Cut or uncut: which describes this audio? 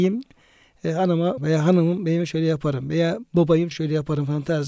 cut